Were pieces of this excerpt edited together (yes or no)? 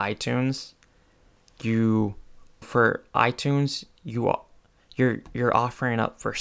yes